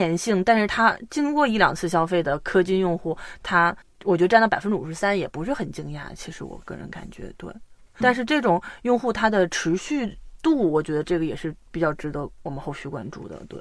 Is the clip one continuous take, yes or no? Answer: no